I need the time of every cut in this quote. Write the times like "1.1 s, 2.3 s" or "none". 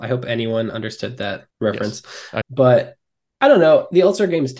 1.5 s, 2.4 s